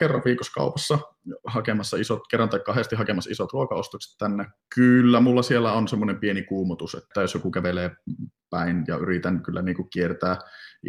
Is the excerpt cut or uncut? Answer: uncut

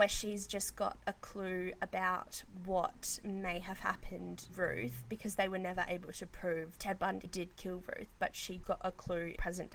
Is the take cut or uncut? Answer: cut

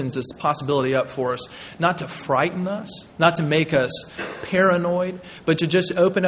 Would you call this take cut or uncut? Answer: cut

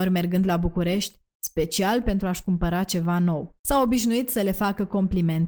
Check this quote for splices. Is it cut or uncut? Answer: cut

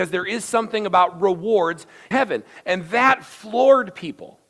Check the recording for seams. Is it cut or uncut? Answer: cut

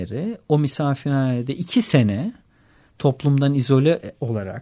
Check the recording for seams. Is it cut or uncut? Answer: uncut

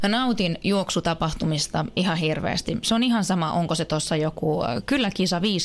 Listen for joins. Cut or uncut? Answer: uncut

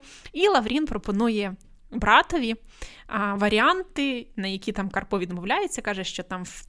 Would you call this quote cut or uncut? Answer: uncut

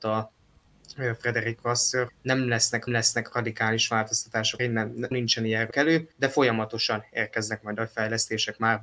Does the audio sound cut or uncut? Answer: cut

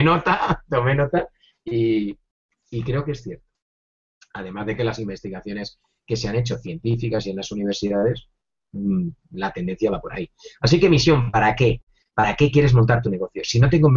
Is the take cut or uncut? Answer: uncut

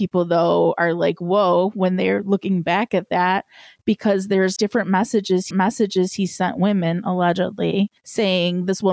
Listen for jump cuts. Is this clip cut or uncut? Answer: cut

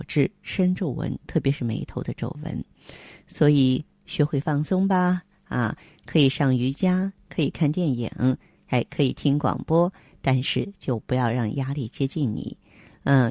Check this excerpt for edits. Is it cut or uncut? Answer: uncut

